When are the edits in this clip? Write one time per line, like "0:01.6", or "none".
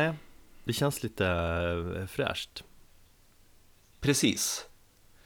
none